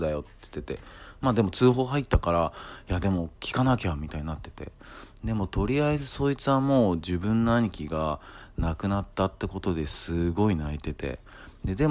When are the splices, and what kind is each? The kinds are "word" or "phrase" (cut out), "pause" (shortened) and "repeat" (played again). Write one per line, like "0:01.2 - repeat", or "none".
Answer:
0:03.3 - pause